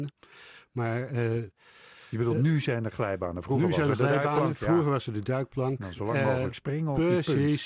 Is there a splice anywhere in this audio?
no; 0 cuts

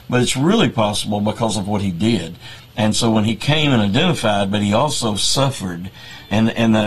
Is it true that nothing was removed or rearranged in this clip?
yes; 0 cuts

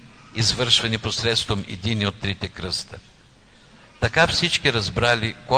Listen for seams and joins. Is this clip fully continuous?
yes; 0 cuts

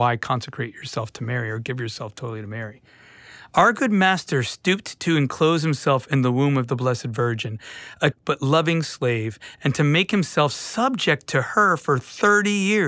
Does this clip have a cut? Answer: yes; 1 cut; at 8.1 s

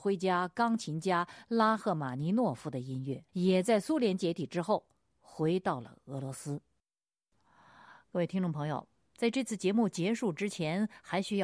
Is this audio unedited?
no; 1 cut; at 3.3 s

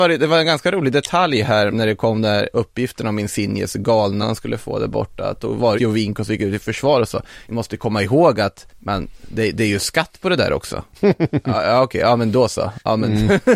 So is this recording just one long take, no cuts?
no; 6 cuts; at 1.7 s, 4.2 s, 5.8 s, 7.5 s, 8.7 s, 10.9 s

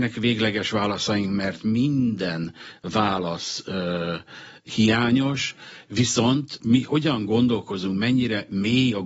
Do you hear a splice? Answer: yes; 1 cut; at 6.6 s

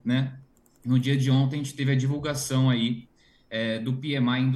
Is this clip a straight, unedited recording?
yes; 0 cuts

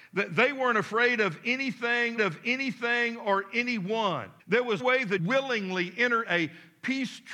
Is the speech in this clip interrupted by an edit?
yes; 5 cuts; at 2.2 s, 4.4 s, 4.8 s, 5.2 s, 6.3 s

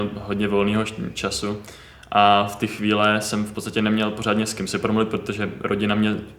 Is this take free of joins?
yes; 0 cuts

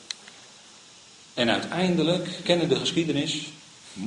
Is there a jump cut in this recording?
yes; 1 cut; at 2.4 s

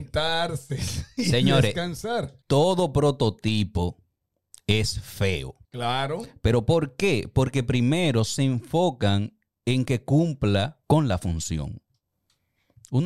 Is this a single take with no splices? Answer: no; 3 cuts; at 2.4 s, 5.6 s, 10.8 s

